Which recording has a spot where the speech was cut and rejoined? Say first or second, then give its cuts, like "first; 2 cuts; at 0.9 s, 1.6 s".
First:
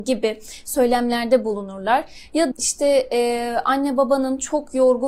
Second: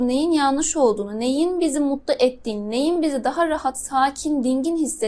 first; 1 cut; at 2.5 s